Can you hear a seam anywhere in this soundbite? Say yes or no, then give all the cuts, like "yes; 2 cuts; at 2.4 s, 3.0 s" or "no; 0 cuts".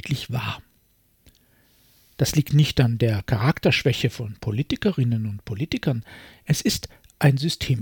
no; 0 cuts